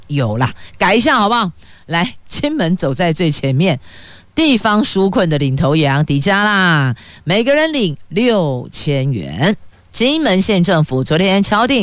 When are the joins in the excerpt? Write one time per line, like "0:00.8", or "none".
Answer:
none